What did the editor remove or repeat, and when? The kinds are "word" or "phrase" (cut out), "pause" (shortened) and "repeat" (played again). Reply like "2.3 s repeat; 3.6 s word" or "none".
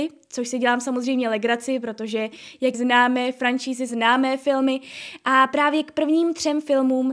2.7 s phrase; 3.9 s word